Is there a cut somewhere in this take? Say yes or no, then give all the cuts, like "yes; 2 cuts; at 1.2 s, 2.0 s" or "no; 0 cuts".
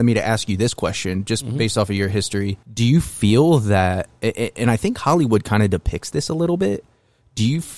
yes; 1 cut; at 2.6 s